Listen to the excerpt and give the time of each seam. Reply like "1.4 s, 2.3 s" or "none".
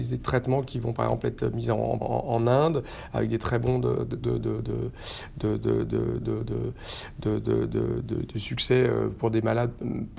2.0 s, 4.2 s, 6.2 s